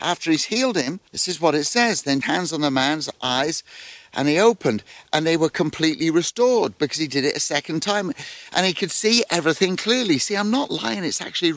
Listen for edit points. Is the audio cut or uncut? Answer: cut